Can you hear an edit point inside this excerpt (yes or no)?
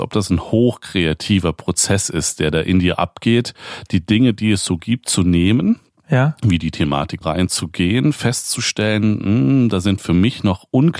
yes